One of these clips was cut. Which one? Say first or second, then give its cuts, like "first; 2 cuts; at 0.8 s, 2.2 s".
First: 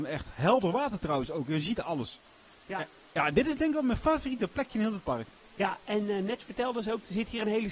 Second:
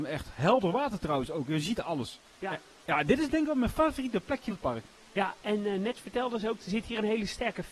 second; 2 cuts; at 2.3 s, 4.5 s